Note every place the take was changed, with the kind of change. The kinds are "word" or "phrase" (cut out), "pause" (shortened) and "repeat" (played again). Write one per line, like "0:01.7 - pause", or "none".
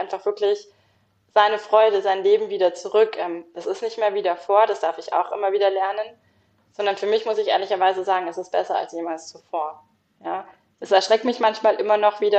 none